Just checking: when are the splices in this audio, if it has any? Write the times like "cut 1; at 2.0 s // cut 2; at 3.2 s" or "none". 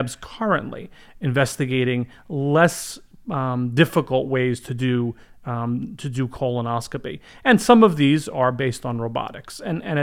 none